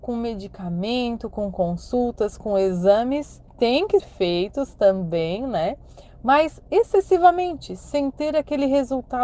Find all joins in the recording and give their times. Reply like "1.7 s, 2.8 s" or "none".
3.5 s, 4.0 s